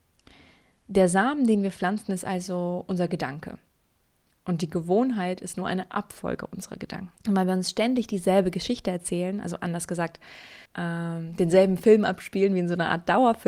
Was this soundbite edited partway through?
yes; 2 cuts; at 7.2 s, 10.7 s

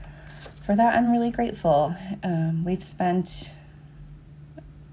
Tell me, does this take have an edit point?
no; 0 cuts

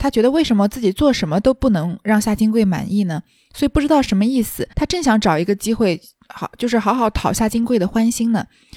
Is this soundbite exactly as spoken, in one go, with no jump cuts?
no; 1 cut; at 4.7 s

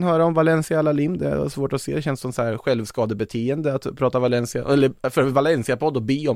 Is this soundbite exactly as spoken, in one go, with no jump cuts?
yes; 0 cuts

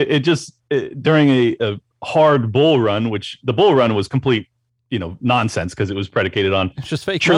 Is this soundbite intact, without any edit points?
yes; 0 cuts

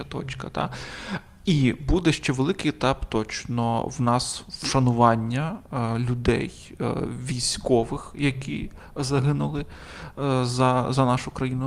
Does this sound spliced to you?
no; 0 cuts

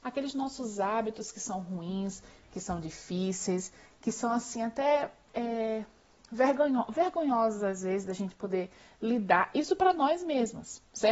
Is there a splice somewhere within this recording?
no; 0 cuts

